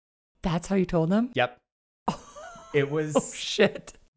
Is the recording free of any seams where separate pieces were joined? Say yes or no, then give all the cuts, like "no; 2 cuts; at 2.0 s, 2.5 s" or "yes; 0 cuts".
yes; 0 cuts